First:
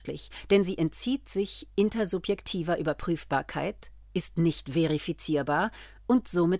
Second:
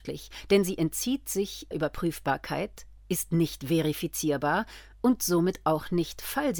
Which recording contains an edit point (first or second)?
second